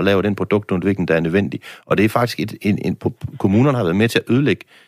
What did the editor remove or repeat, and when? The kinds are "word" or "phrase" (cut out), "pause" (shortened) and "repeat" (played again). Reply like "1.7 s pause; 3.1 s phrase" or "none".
none